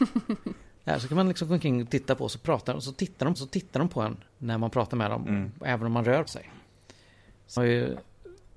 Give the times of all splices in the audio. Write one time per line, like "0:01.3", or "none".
0:03.4
0:04.3
0:06.3
0:07.6